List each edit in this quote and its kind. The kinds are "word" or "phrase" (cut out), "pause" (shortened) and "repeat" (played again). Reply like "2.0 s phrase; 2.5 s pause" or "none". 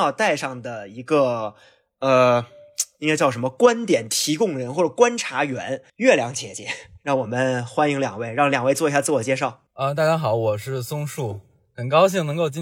5.9 s pause; 9.7 s pause